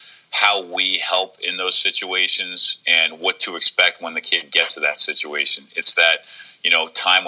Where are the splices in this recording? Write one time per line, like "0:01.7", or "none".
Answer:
none